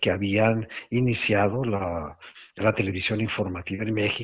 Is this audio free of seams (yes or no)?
yes